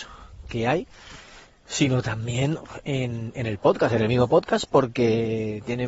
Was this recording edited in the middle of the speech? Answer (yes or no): no